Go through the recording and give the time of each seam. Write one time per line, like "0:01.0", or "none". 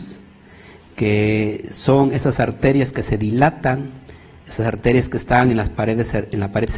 none

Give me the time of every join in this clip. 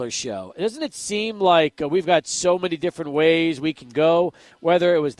none

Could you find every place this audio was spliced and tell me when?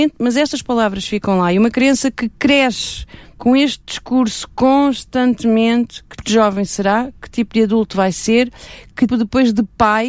0:06.2
0:09.1

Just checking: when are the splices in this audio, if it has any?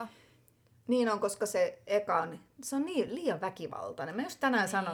none

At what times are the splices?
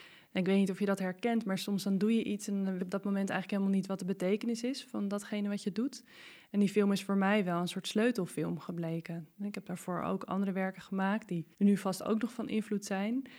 0:02.8
0:11.5

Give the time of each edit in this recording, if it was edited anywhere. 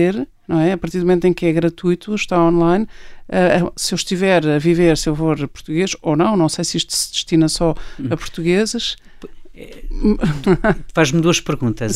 none

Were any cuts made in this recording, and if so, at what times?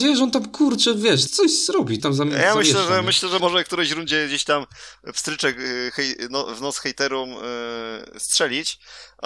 0:01.3
0:02.0
0:03.4

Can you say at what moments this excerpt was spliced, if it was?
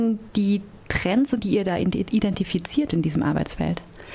0:01.4
0:02.9

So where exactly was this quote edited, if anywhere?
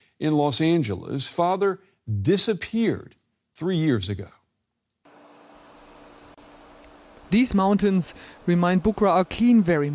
0:01.3

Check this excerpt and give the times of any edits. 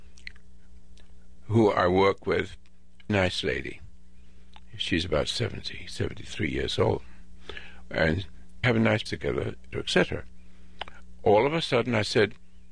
0:03.1
0:08.6
0:09.1
0:09.7

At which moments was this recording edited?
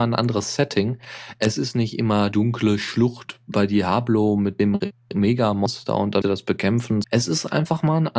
0:02.3
0:03.5
0:06.2
0:07.0

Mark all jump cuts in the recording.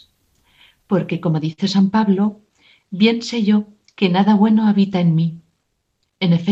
none

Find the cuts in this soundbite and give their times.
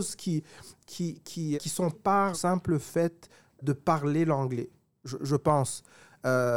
0:01.5
0:01.9
0:02.3
0:03.6
0:05.2

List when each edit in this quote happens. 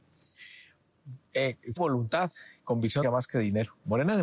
0:01.2
0:01.8
0:03.0

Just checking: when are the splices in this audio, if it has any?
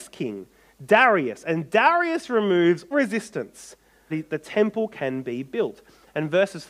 0:02.9
0:04.1

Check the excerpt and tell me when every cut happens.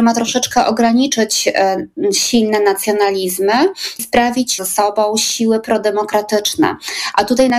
0:04.0
0:04.6

